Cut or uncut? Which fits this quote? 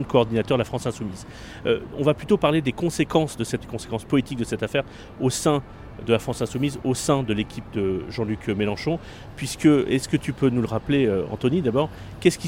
cut